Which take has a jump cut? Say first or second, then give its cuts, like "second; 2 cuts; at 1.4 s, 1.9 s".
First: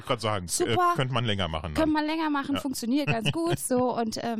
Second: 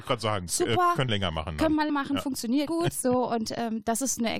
second; 3 cuts; at 1.1 s, 1.9 s, 2.7 s